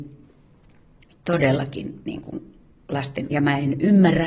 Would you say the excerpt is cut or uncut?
cut